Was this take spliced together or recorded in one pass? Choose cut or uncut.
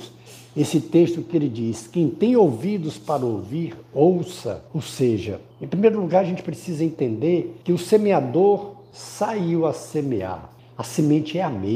cut